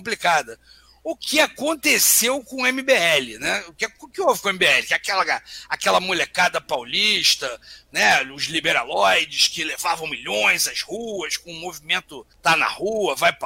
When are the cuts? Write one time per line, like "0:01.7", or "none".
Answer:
0:12.3